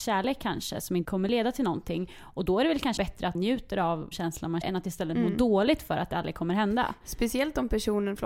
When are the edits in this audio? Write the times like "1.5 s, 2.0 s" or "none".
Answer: 1.0 s, 3.0 s, 3.3 s, 4.1 s, 4.6 s